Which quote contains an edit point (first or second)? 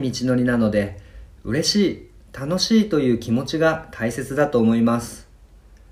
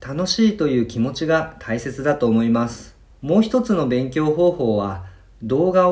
second